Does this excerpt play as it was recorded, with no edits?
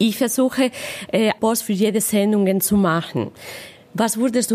no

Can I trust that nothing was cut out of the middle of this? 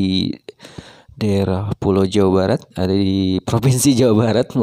no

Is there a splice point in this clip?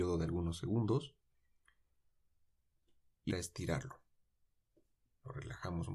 yes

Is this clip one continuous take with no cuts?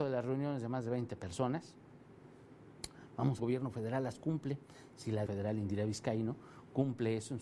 no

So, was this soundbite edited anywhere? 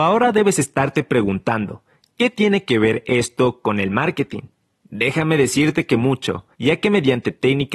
yes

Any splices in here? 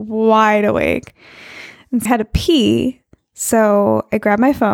yes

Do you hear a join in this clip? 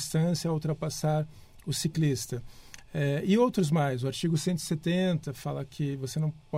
no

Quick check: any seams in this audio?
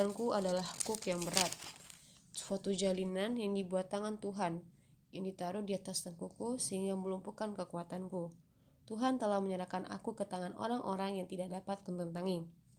no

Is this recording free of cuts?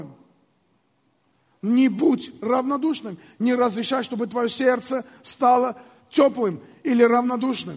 yes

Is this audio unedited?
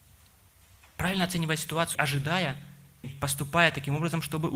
no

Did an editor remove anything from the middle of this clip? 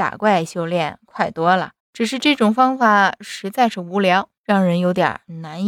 yes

